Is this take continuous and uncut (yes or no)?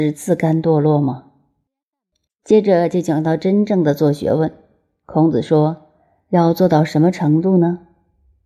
yes